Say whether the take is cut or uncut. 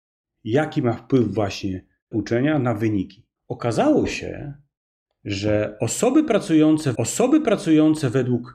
cut